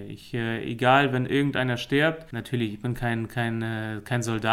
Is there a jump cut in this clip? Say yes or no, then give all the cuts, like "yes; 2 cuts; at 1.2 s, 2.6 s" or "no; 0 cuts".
no; 0 cuts